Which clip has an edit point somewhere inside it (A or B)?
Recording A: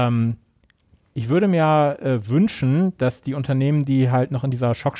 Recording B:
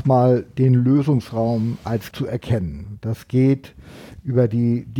B